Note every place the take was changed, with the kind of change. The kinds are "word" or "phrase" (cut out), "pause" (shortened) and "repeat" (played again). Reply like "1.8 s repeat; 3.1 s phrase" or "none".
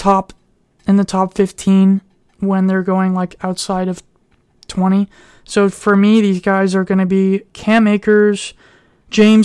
none